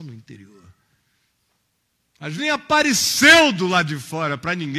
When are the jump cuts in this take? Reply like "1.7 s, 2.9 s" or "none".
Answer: 2.4 s

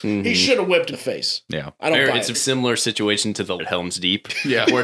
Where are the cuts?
0.9 s, 2.3 s, 3.6 s

